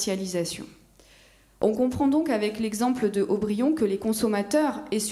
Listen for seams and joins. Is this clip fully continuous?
yes; 0 cuts

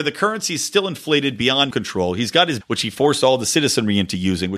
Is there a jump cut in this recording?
yes; 2 cuts; at 1.7 s, 2.6 s

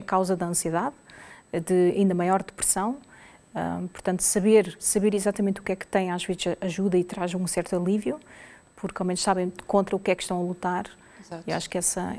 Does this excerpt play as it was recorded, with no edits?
yes; 0 cuts

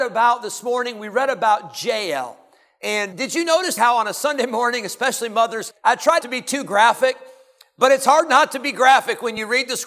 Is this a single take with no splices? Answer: no; 4 cuts; at 3.1 s, 3.8 s, 5.7 s, 6.2 s

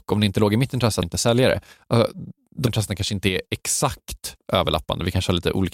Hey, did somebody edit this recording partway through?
yes; 2 cuts; at 1.0 s, 2.7 s

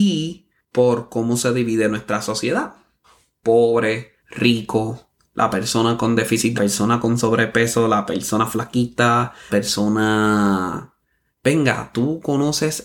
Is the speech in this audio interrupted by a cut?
yes; 3 cuts; at 4.2 s, 6.6 s, 9.5 s

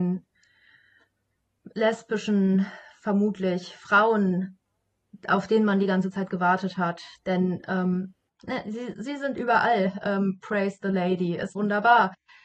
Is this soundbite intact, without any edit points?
no; 3 cuts; at 1.7 s, 8.9 s, 11.5 s

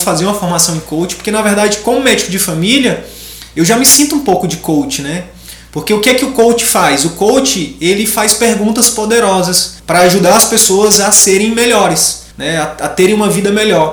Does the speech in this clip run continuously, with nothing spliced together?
no; 2 cuts; at 9.8 s, 12.3 s

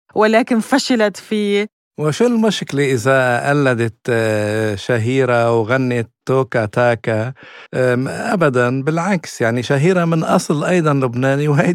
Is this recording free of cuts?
no; 1 cut; at 7.7 s

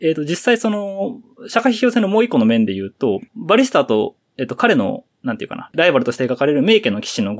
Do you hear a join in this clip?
no; 0 cuts

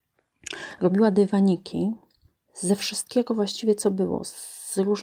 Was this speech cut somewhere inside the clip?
no; 0 cuts

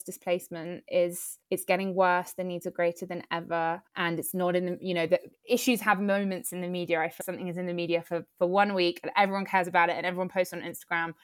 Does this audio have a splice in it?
yes; 3 cuts; at 1.4 s, 3.9 s, 7.2 s

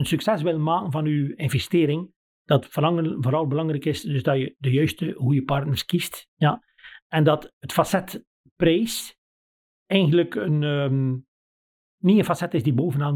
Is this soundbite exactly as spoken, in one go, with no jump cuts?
no; 1 cut; at 7.5 s

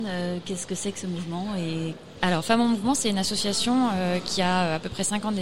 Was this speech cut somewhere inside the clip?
no; 0 cuts

